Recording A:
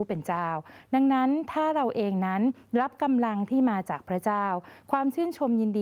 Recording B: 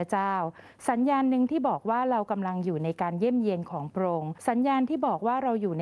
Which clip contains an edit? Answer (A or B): B